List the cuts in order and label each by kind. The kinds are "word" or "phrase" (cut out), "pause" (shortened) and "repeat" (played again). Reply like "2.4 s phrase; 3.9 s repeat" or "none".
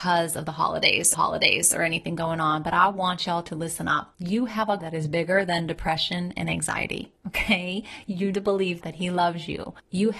1.1 s repeat; 4.1 s pause; 4.8 s word; 8.3 s phrase; 8.8 s word

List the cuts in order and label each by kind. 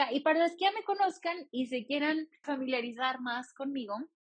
2.4 s word

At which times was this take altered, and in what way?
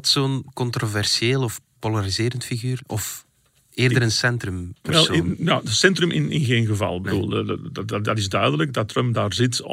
none

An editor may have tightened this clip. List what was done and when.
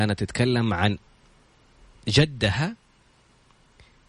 none

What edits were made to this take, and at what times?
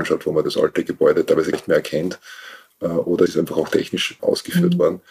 1.5 s word; 3.3 s word; 4.2 s word

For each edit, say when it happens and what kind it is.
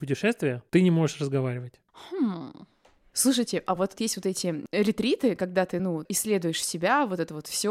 none

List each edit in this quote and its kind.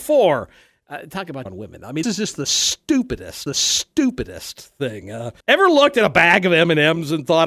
1.5 s phrase; 2.0 s word; 3.5 s repeat; 5.4 s pause

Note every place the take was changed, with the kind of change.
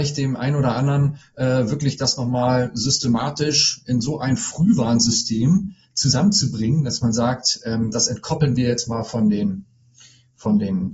none

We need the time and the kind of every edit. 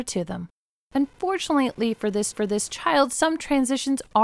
2.3 s repeat

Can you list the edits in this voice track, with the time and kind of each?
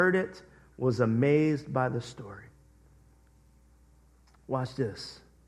none

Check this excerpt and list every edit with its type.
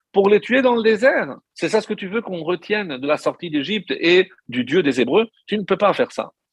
1.5 s pause; 4.4 s pause

